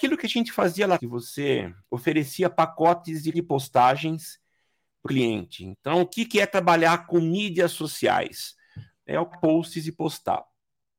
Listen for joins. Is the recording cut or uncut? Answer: cut